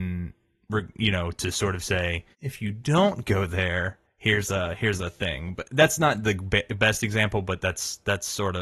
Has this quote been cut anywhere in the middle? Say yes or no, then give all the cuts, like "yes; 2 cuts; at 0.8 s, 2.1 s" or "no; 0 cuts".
yes; 2 cuts; at 2.3 s, 4.0 s